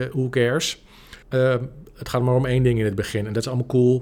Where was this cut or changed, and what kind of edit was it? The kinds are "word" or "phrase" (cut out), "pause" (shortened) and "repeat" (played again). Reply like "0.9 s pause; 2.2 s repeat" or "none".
1.2 s pause

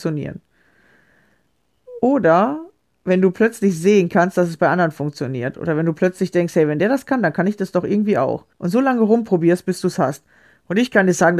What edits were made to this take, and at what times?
8.5 s pause

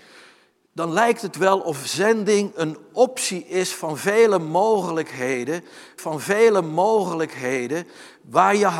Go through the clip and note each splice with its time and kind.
6.0 s repeat

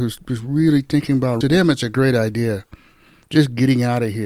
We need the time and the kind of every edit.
1.4 s phrase

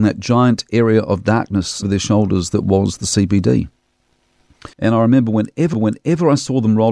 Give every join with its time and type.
1.8 s word; 4.7 s pause; 5.7 s repeat

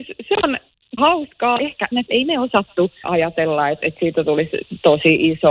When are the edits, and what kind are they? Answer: 1.0 s word; 1.6 s word; 1.9 s word; 3.0 s word

